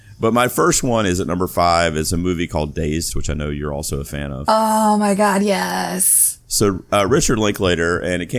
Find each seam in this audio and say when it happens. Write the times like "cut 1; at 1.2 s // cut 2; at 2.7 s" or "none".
cut 1; at 3.1 s